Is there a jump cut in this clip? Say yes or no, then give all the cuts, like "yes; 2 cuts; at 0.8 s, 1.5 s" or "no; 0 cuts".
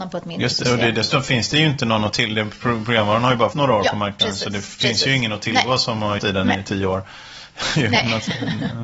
yes; 2 cuts; at 3.5 s, 6.2 s